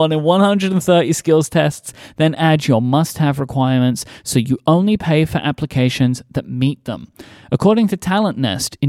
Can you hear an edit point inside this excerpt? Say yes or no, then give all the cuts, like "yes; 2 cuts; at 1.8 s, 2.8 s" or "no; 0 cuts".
no; 0 cuts